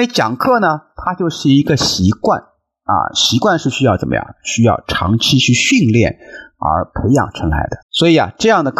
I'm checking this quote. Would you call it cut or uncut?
cut